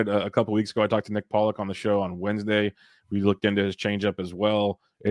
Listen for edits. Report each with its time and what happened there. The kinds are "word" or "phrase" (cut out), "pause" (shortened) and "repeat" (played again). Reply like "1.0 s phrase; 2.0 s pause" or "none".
none